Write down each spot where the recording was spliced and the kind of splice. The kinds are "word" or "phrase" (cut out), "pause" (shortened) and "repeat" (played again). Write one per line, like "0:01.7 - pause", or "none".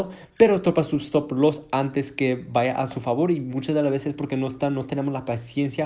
none